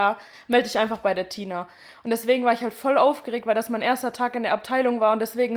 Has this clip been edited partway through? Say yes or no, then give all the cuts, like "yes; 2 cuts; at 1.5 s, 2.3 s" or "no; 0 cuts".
no; 0 cuts